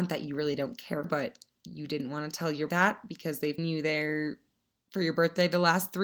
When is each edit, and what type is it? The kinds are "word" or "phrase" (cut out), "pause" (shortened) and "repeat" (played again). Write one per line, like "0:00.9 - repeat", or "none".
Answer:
0:01.0 - word
0:02.7 - word
0:03.6 - word